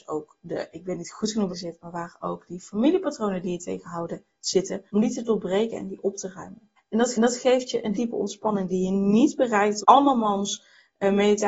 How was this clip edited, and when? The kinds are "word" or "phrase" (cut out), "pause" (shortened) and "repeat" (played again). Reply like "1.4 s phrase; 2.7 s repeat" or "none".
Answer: 1.5 s word; 4.9 s pause; 6.8 s pause; 7.1 s repeat; 7.9 s word; 9.8 s word